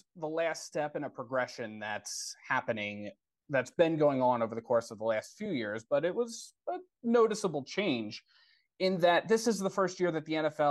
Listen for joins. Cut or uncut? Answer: uncut